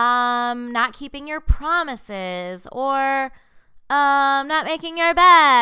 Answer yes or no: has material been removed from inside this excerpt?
no